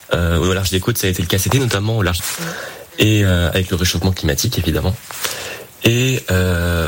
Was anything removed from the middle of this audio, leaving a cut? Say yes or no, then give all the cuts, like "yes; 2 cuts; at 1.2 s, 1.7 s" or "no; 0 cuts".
yes; 2 cuts; at 1.5 s, 2.2 s